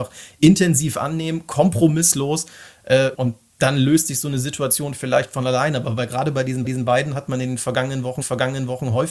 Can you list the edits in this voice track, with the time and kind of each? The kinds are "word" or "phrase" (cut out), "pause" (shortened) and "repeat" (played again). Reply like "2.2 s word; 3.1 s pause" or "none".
3.1 s word; 6.6 s repeat; 8.2 s repeat